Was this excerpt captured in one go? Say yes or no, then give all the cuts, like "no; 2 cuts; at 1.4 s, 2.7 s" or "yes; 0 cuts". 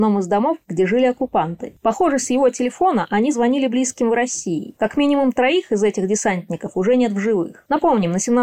yes; 0 cuts